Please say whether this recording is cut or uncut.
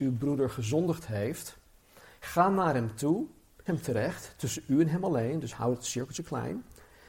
cut